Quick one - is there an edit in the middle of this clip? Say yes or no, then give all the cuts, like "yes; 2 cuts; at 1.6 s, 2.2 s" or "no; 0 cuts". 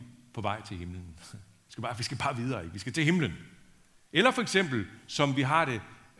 no; 0 cuts